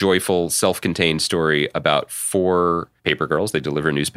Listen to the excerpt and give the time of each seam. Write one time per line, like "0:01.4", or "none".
0:03.0